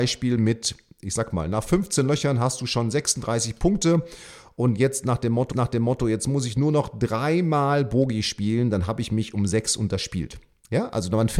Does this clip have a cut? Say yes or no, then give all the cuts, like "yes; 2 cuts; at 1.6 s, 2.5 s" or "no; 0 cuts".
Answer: yes; 1 cut; at 5.5 s